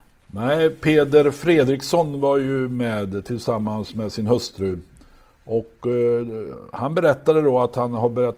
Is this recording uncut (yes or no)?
yes